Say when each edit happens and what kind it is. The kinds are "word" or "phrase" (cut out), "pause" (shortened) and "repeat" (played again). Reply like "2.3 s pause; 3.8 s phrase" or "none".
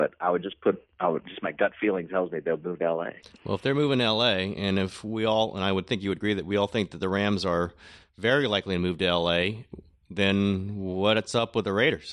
none